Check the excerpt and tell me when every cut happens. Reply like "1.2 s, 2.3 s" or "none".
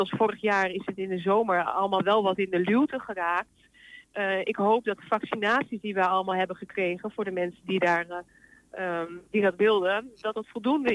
none